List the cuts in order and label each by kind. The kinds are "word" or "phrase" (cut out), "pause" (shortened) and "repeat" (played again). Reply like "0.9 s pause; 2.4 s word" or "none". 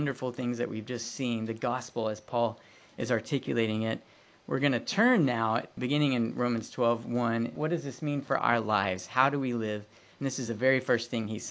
none